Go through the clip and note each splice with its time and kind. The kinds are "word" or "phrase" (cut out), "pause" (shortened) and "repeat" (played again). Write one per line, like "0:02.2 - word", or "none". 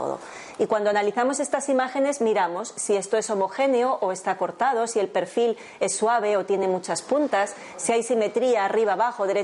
none

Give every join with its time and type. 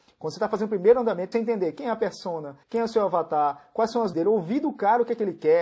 0:01.3 - phrase
0:02.6 - pause
0:04.1 - word

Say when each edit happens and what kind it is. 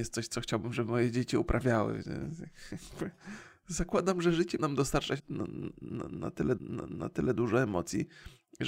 0:04.6 - word
0:05.2 - word
0:06.6 - repeat

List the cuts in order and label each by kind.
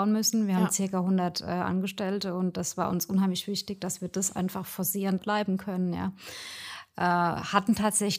0:05.2 - phrase

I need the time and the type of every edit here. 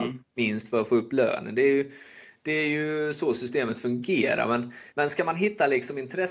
0:04.9 - pause

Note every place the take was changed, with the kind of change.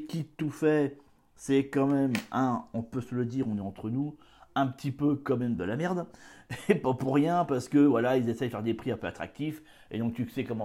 none

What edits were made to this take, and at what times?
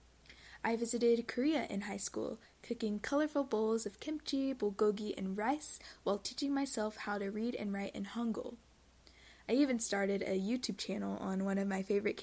none

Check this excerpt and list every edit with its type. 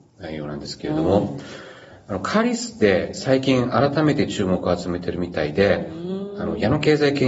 none

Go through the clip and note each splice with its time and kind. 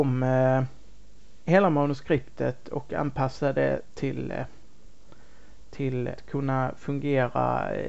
0:06.2 - word

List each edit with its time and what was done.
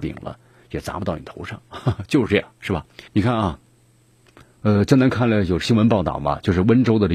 0:03.1 - pause

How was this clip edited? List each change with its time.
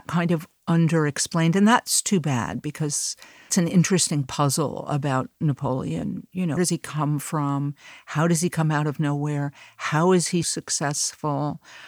0:03.5 - word
0:06.6 - word
0:10.4 - word

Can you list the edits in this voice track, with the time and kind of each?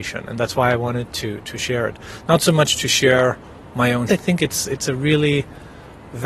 0:04.1 - phrase

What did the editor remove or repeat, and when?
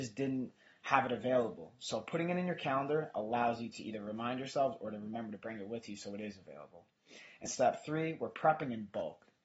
0:07.5 - word

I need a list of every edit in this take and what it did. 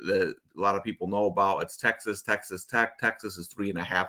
none

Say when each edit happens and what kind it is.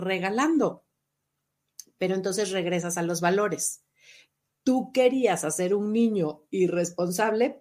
none

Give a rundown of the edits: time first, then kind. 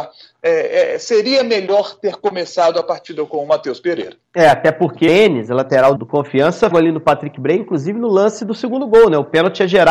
0:04.2 - pause
0:05.1 - phrase
0:06.0 - word
0:06.7 - phrase

